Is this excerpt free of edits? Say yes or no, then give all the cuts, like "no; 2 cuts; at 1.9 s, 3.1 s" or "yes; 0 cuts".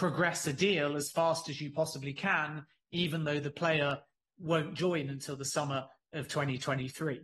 yes; 0 cuts